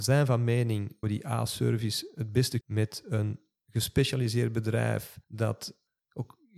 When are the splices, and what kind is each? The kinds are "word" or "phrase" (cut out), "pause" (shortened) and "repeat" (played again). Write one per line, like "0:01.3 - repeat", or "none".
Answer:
0:01.0 - word
0:02.6 - phrase
0:05.2 - pause